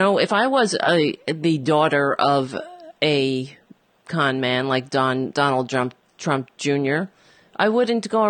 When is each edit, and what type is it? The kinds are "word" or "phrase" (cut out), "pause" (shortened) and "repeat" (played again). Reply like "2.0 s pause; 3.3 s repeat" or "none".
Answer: none